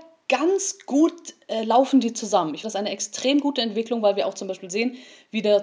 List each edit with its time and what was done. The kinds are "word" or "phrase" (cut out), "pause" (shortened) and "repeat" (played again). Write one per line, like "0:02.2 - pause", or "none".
0:02.6 - word